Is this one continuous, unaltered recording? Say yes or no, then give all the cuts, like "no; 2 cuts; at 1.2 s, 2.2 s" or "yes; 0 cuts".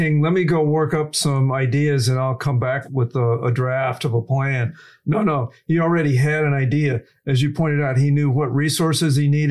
yes; 0 cuts